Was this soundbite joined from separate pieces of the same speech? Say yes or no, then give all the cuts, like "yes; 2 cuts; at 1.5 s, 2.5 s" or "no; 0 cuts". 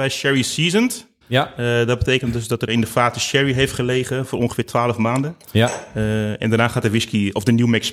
yes; 3 cuts; at 1.2 s, 2.7 s, 5.4 s